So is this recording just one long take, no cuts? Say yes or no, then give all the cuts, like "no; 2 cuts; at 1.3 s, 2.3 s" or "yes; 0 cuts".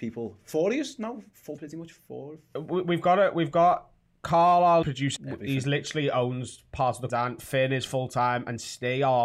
no; 4 cuts; at 1.6 s, 4.8 s, 5.2 s, 7.1 s